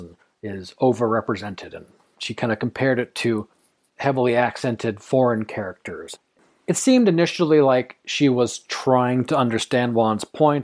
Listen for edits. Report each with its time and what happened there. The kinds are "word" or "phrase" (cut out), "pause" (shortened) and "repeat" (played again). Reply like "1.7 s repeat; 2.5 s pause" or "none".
none